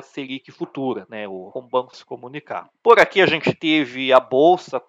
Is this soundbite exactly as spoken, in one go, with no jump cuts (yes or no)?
no